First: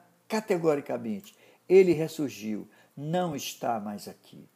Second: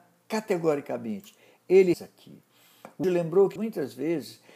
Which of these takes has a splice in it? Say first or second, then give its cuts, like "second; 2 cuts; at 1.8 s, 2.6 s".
second; 3 cuts; at 1.9 s, 3.0 s, 3.6 s